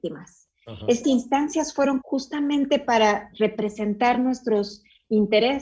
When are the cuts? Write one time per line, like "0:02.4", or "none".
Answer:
0:01.0
0:02.0